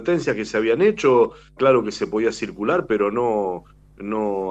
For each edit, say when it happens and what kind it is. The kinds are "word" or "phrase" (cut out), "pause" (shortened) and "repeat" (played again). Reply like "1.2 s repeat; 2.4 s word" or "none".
1.6 s word